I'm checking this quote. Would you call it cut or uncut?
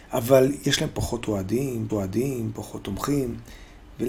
cut